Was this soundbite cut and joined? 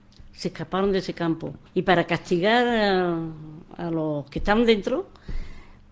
yes; 1 cut; at 1.7 s

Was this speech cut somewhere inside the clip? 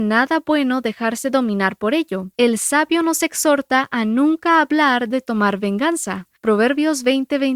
yes; 2 cuts; at 2.3 s, 6.4 s

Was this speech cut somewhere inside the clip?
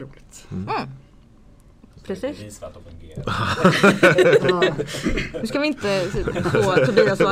yes; 1 cut; at 2.8 s

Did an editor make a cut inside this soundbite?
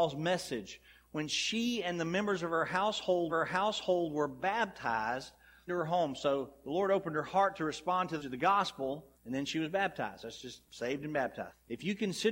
yes; 5 cuts; at 3.3 s, 5.7 s, 8.2 s, 9.1 s, 10.7 s

